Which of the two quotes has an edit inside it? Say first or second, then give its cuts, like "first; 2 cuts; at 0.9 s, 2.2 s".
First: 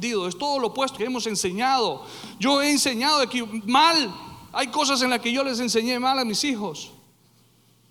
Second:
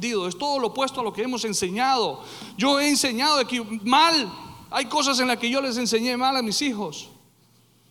first; 1 cut; at 1.0 s